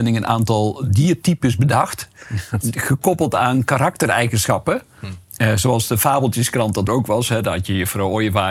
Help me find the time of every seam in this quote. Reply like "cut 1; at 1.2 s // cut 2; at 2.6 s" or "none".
cut 1; at 2.6 s // cut 2; at 6.9 s